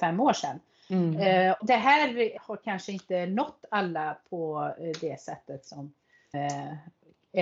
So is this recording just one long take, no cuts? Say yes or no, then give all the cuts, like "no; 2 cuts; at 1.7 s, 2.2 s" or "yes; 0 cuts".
no; 3 cuts; at 1.6 s, 2.4 s, 6.3 s